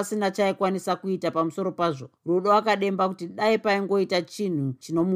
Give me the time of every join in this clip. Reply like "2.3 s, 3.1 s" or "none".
2.2 s